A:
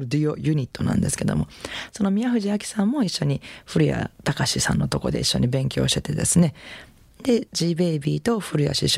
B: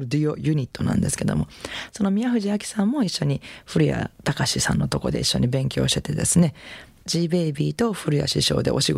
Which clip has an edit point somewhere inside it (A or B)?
B